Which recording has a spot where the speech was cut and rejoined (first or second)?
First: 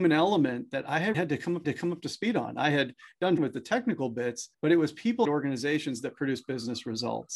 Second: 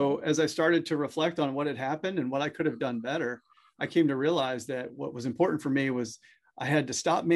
first